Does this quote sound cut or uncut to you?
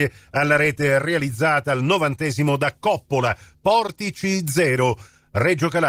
uncut